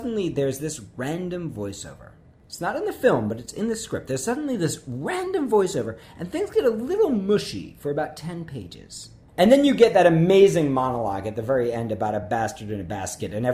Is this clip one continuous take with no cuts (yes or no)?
yes